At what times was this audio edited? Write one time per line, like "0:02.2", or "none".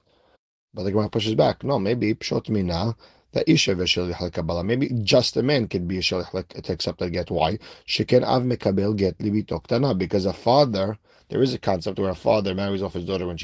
none

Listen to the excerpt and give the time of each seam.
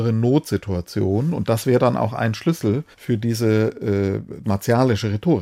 0:02.9
0:04.4

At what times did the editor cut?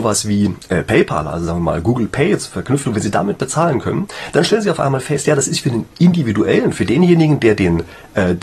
0:02.9

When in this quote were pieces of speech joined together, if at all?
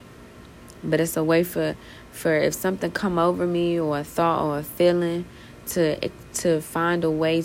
none

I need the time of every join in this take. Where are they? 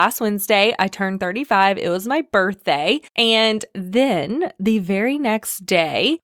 0:03.1

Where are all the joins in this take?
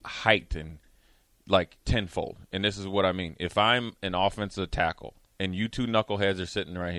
0:01.8
0:05.2

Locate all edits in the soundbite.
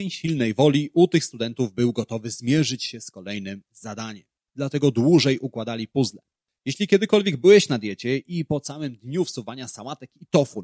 none

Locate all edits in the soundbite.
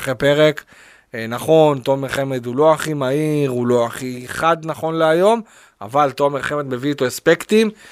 none

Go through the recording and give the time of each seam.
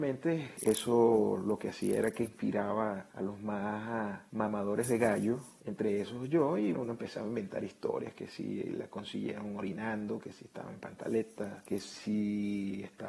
0:06.7

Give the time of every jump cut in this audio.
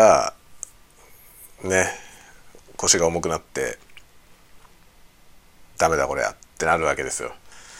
0:05.7

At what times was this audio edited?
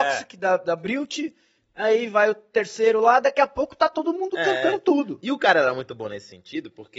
none

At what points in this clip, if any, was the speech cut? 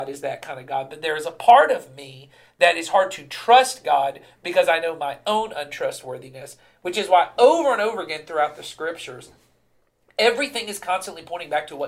none

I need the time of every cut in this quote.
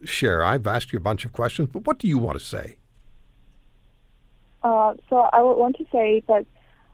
none

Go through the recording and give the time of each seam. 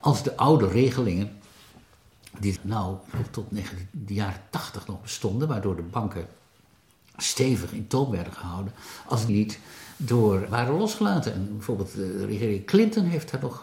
0:02.6
0:09.3
0:10.5

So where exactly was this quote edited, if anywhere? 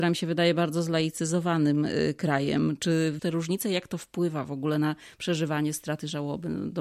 0:03.2

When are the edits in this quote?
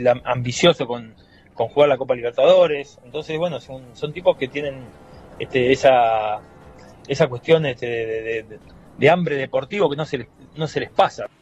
none

